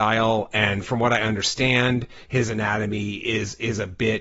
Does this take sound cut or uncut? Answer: uncut